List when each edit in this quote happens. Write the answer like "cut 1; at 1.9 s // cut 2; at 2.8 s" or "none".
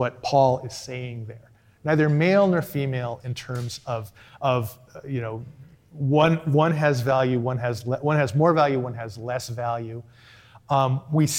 none